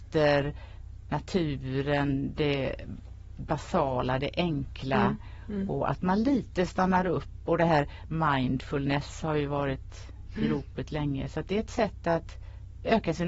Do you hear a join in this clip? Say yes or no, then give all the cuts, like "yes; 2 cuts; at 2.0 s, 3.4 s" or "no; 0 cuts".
no; 0 cuts